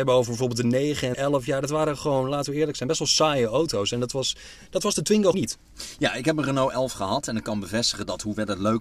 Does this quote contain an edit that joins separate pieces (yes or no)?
yes